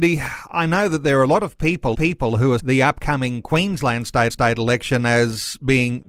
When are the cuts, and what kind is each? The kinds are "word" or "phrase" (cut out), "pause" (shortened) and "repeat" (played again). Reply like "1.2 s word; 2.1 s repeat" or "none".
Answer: 1.9 s repeat; 2.6 s word; 4.3 s repeat

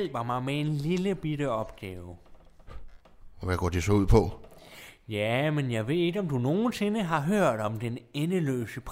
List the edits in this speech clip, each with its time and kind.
none

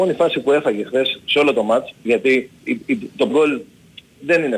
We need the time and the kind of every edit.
2.6 s pause; 3.3 s word

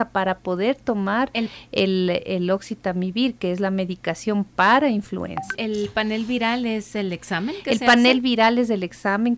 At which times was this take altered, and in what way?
none

